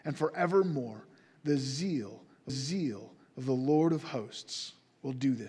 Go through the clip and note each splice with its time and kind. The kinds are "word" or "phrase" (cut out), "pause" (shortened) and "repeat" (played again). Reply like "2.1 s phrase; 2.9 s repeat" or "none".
2.5 s repeat